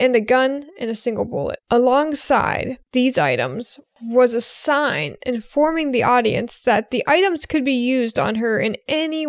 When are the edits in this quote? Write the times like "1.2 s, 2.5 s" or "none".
1.6 s

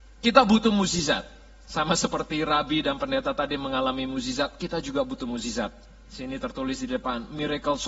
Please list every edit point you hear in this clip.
none

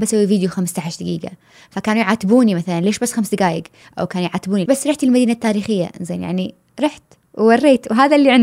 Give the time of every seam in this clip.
4.6 s

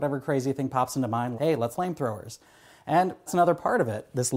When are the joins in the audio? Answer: 1.4 s, 1.7 s, 3.3 s

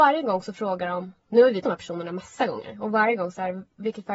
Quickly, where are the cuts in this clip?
1.6 s

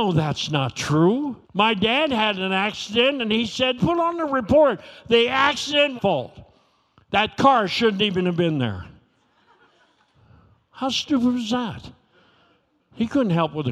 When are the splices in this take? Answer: 1.4 s, 3.8 s, 6.0 s

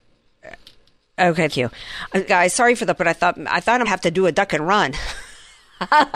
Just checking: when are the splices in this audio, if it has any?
1.5 s, 2.3 s, 3.0 s, 3.8 s

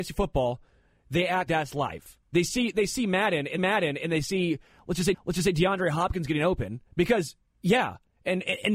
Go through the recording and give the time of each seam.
1.5 s, 2.2 s, 3.6 s, 5.1 s, 6.9 s

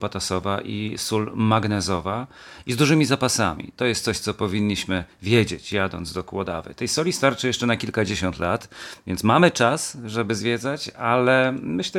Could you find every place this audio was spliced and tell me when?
none

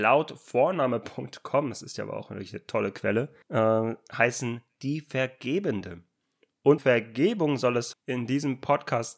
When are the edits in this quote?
3.4 s, 6.8 s, 7.9 s

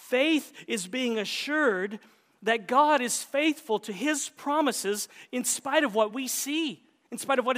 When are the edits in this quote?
none

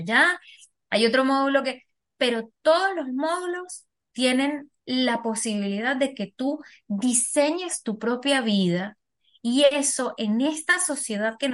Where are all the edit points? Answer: none

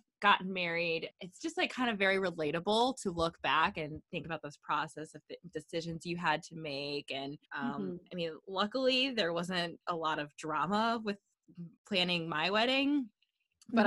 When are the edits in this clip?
1.1 s, 7.5 s, 11.8 s

